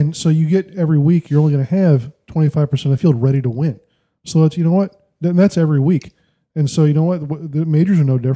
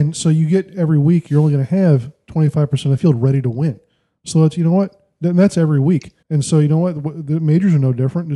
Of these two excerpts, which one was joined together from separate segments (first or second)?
second